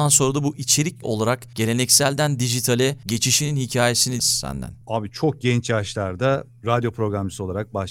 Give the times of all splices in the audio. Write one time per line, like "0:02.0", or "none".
0:01.0
0:04.2